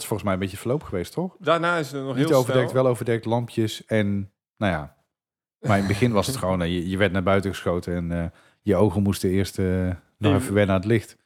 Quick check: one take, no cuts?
yes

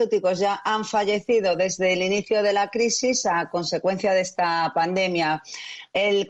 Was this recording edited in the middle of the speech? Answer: no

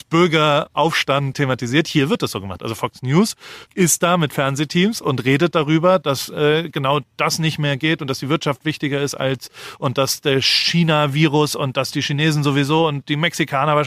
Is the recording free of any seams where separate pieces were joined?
no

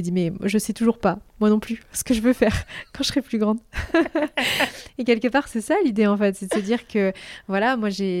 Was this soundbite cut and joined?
no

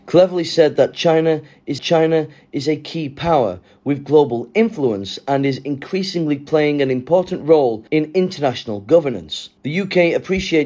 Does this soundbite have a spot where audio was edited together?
yes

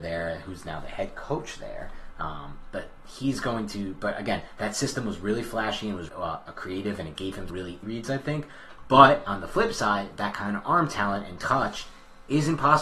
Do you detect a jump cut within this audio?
yes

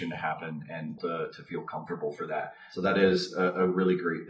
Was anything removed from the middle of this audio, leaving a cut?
yes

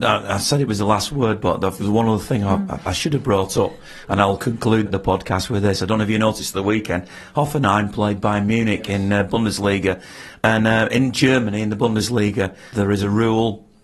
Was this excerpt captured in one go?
no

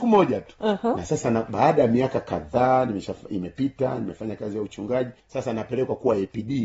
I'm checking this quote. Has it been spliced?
yes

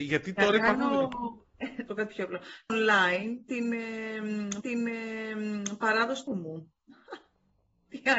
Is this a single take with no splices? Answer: no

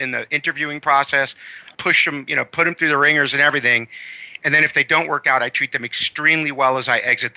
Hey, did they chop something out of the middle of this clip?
yes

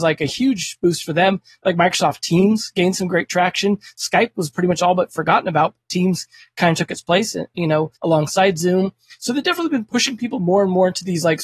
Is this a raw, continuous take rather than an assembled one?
no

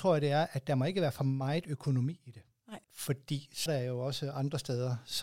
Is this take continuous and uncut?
no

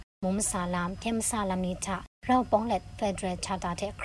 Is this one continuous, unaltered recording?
yes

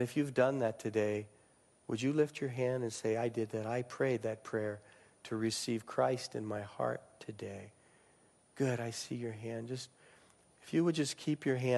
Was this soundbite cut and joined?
no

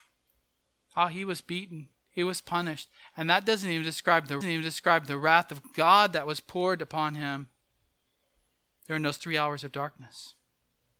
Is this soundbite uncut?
no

